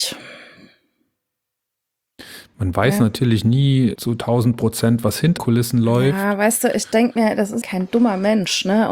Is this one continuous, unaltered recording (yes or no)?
no